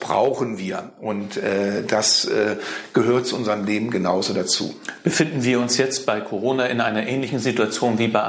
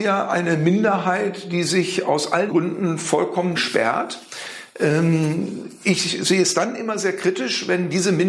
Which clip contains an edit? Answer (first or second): second